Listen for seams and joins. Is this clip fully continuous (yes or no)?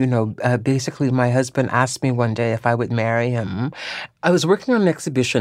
yes